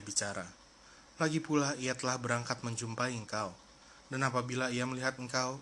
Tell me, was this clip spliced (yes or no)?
no